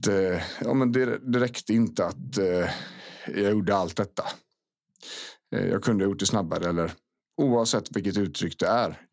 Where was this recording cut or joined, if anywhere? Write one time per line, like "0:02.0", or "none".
none